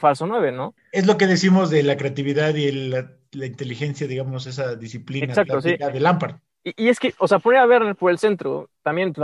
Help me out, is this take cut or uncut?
uncut